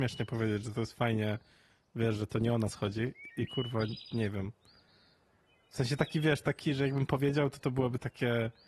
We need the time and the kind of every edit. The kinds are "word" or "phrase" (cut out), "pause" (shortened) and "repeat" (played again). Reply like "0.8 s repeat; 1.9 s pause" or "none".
none